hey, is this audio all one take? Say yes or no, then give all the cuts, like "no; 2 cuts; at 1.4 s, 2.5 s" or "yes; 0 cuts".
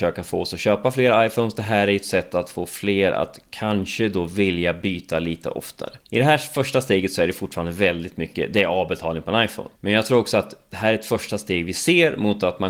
no; 2 cuts; at 6.0 s, 9.8 s